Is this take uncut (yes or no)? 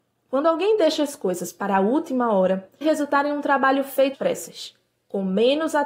no